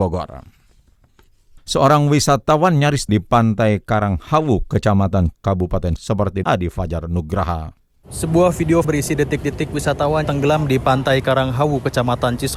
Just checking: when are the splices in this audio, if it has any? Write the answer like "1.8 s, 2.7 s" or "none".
3.1 s, 5.3 s, 6.0 s, 6.4 s, 8.8 s, 10.2 s